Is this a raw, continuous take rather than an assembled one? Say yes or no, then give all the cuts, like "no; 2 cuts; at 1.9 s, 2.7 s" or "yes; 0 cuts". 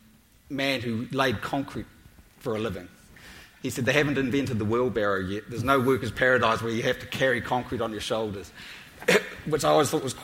yes; 0 cuts